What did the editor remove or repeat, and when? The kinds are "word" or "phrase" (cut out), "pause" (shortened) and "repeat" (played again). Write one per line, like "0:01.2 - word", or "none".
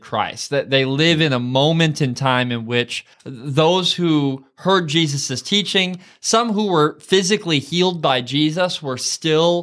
0:03.1 - pause